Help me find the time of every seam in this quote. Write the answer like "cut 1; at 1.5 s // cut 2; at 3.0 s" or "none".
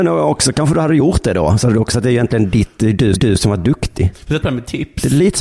cut 1; at 1.9 s // cut 2; at 3.2 s // cut 3; at 4.4 s